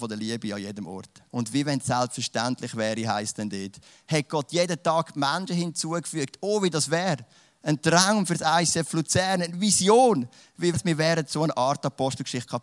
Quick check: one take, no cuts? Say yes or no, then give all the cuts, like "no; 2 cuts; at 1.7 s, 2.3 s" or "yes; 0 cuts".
no; 2 cuts; at 1.3 s, 10.7 s